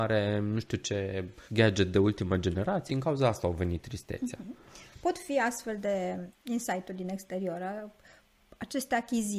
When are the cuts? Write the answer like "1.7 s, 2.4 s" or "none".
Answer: 1.4 s, 2.9 s, 6.3 s